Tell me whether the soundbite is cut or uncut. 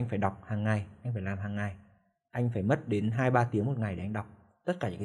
uncut